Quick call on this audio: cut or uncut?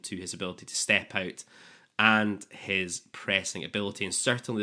uncut